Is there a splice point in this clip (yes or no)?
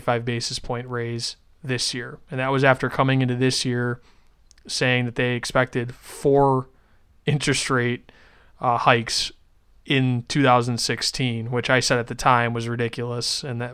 no